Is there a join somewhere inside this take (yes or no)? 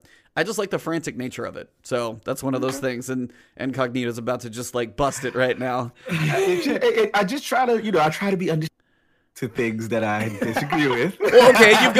no